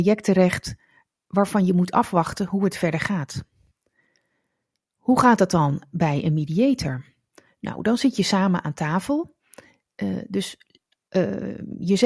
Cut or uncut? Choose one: uncut